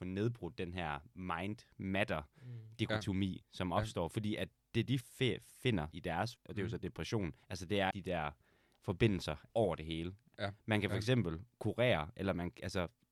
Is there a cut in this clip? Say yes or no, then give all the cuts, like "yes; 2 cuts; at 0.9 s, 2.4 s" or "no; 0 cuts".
yes; 6 cuts; at 5.0 s, 5.9 s, 6.4 s, 7.4 s, 7.9 s, 9.5 s